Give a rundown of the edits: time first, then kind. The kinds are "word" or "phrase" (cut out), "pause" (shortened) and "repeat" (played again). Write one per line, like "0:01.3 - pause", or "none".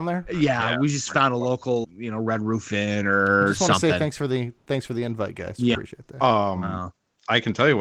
0:01.8 - word
0:05.7 - word